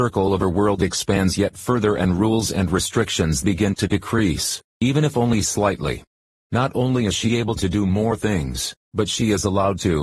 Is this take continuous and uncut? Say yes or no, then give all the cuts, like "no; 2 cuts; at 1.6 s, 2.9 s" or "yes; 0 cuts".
yes; 0 cuts